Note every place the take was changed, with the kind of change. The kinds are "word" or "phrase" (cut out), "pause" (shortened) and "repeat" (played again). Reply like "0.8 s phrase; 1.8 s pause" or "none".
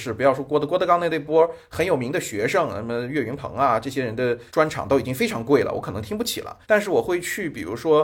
4.5 s pause; 6.6 s pause